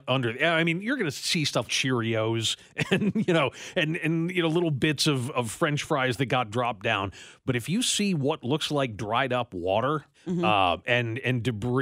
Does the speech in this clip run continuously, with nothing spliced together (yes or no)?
no